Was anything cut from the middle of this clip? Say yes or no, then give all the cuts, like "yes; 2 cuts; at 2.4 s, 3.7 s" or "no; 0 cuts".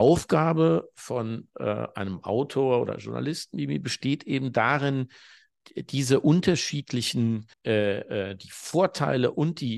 yes; 1 cut; at 7.5 s